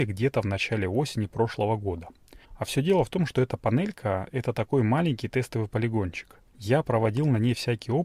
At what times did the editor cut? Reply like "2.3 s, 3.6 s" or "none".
2.4 s, 6.5 s